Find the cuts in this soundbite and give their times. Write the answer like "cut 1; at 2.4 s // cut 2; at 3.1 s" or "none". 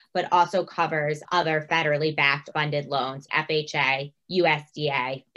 cut 1; at 1.2 s // cut 2; at 2.5 s // cut 3; at 3.3 s // cut 4; at 4.2 s

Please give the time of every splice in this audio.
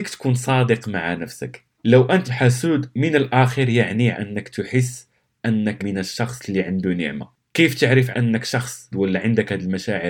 cut 1; at 2.2 s // cut 2; at 4.1 s // cut 3; at 5.8 s // cut 4; at 8.1 s // cut 5; at 8.9 s

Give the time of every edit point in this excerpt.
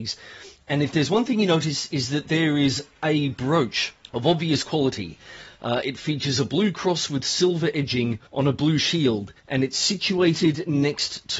cut 1; at 4.0 s // cut 2; at 8.3 s // cut 3; at 9.4 s

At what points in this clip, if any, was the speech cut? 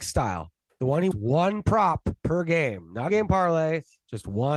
cut 1; at 1.1 s // cut 2; at 2.2 s // cut 3; at 3.1 s

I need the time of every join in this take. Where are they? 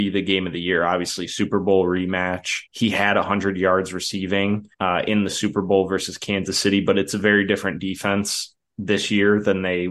cut 1; at 2.7 s // cut 2; at 4.7 s

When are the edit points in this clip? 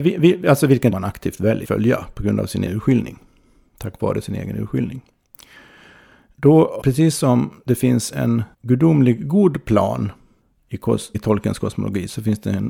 cut 1; at 0.9 s // cut 2; at 1.6 s // cut 3; at 2.7 s // cut 4; at 6.8 s // cut 5; at 8.5 s // cut 6; at 10.4 s // cut 7; at 11.1 s

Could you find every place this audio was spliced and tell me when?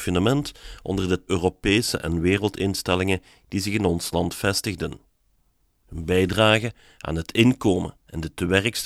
cut 1; at 1.3 s

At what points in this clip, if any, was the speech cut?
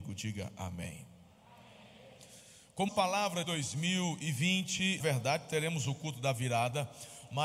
cut 1; at 2.9 s // cut 2; at 3.4 s // cut 3; at 5.0 s

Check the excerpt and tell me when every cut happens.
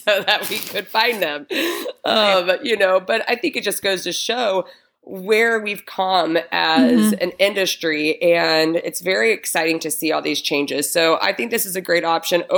none

